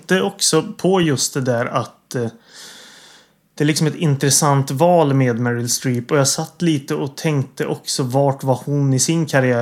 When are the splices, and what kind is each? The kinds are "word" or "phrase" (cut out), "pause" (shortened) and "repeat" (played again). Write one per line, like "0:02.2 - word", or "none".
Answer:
none